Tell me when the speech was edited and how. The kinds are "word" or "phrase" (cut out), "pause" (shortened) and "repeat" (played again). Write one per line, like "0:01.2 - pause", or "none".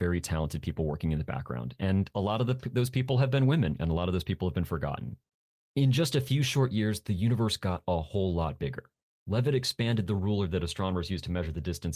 none

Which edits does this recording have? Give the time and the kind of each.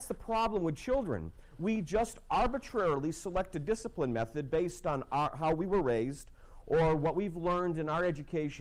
none

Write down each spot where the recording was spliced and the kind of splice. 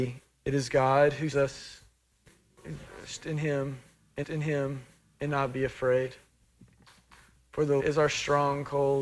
0:01.3 - word
0:04.2 - repeat
0:07.8 - word

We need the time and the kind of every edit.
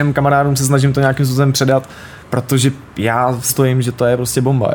0:02.2 - pause
0:03.5 - word

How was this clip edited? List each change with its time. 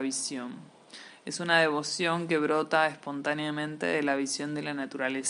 none

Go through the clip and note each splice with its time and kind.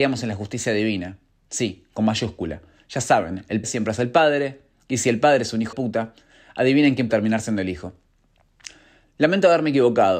0:03.6 - word
0:05.7 - word
0:07.1 - word

